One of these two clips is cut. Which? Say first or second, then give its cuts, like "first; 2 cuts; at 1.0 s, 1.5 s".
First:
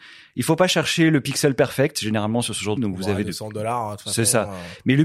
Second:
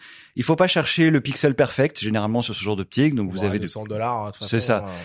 first; 1 cut; at 2.8 s